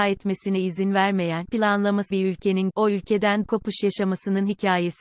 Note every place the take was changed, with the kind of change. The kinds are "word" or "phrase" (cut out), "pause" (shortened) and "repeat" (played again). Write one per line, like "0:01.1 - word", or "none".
0:01.5 - word
0:02.1 - word
0:02.7 - word
0:03.4 - word